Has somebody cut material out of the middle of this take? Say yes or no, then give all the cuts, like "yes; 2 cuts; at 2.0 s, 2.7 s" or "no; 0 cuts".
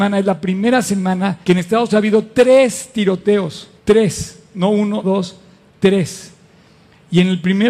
yes; 4 cuts; at 1.4 s, 1.9 s, 3.8 s, 5.0 s